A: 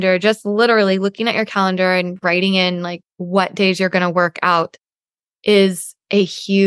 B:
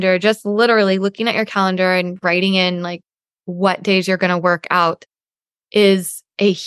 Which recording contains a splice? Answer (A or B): A